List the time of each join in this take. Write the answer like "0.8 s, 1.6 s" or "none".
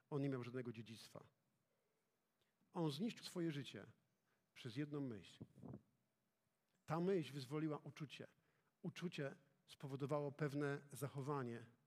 3.2 s